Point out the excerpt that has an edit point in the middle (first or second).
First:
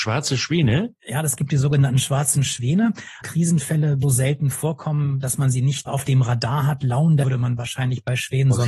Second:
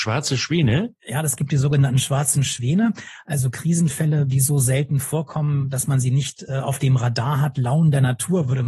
first